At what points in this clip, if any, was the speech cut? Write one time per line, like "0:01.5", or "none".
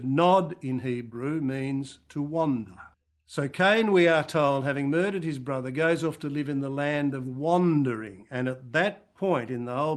0:02.9